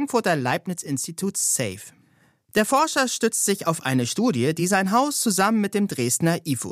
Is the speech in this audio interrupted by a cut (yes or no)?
no